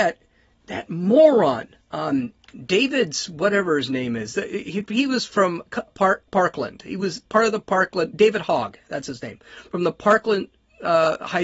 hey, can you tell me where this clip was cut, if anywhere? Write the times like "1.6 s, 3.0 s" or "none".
1.8 s, 5.9 s, 6.3 s

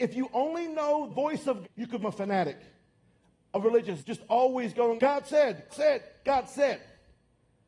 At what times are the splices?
1.1 s, 1.6 s, 2.0 s, 4.0 s, 5.0 s, 5.7 s

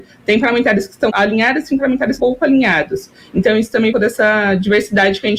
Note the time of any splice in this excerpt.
1.1 s, 2.2 s, 3.9 s

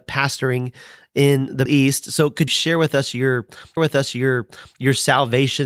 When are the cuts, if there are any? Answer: 1.7 s, 2.5 s, 3.8 s

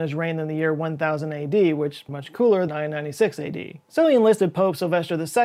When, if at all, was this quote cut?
2.1 s, 2.7 s, 3.8 s

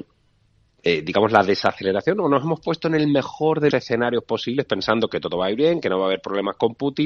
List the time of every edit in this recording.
3.7 s

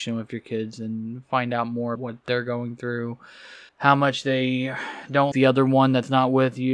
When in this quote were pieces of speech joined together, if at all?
1.9 s, 3.7 s, 5.3 s

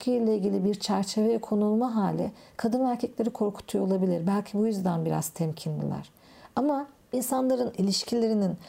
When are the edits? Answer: 7.1 s

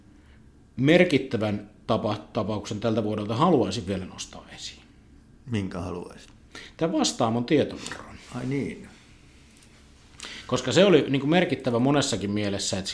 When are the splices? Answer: none

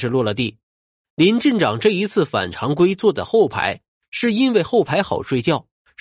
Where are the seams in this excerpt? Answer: none

